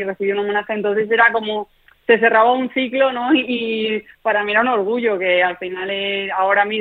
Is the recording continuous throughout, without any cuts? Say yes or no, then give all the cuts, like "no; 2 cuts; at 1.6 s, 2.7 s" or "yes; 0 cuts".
yes; 0 cuts